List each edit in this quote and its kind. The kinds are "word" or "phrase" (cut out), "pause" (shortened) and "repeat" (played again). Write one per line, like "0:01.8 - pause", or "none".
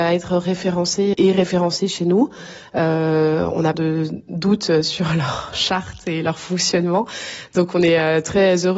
0:01.1 - word
0:03.7 - phrase